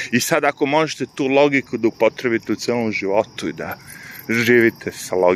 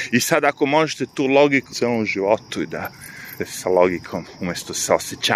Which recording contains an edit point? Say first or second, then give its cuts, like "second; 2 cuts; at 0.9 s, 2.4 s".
second; 2 cuts; at 1.7 s, 3.4 s